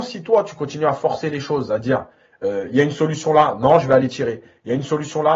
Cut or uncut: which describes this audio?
uncut